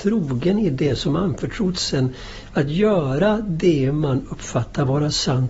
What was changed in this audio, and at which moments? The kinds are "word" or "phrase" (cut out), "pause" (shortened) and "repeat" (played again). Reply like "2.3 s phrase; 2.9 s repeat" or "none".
none